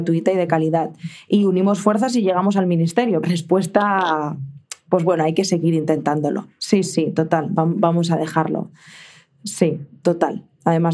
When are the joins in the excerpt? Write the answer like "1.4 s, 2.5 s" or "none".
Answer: 3.2 s